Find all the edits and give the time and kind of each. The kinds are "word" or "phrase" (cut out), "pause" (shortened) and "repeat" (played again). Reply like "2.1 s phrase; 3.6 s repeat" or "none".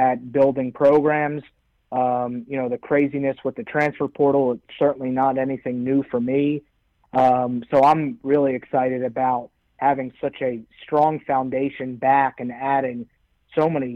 none